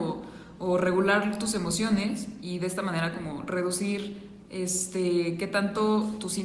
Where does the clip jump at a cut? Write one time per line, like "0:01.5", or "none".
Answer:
none